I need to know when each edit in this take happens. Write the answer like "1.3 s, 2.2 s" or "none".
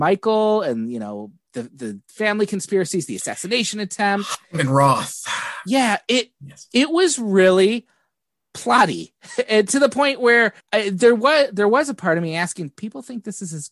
10.6 s